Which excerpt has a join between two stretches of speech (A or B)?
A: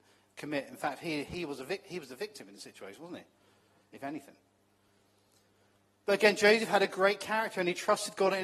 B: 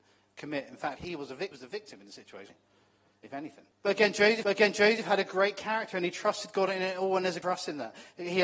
B